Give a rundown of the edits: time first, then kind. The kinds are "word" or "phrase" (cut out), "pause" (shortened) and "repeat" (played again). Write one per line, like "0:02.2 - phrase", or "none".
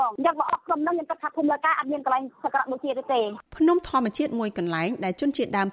0:03.5 - pause